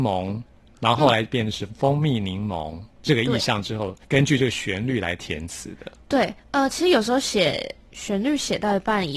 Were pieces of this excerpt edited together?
yes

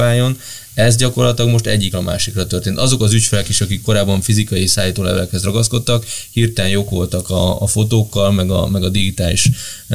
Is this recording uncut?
no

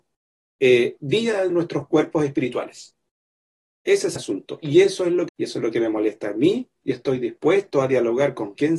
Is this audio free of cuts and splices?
no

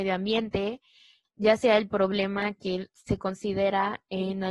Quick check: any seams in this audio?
no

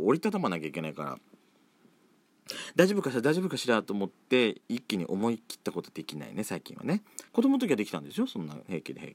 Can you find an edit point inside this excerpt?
yes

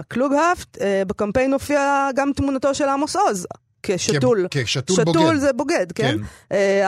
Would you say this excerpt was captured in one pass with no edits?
yes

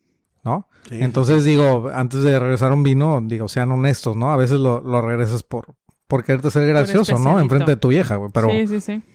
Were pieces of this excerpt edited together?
no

